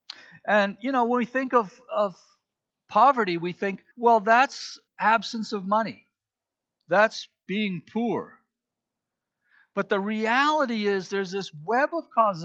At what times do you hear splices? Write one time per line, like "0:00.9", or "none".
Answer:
0:03.9
0:04.9